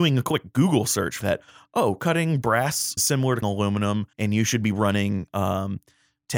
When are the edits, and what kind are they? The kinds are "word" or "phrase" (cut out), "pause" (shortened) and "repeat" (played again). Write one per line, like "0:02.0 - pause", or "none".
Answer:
0:01.2 - word
0:03.0 - word
0:03.4 - word
0:04.1 - pause